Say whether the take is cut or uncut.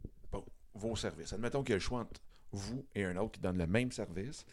uncut